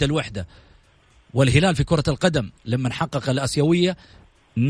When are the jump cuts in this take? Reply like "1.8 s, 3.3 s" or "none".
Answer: 2.6 s

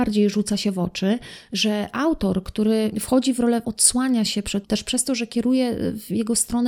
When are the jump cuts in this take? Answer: 2.9 s, 3.6 s, 4.6 s

